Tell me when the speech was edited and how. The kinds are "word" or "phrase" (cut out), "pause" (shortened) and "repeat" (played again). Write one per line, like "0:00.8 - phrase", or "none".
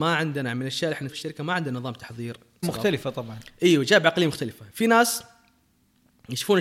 0:01.1 - word
0:02.6 - word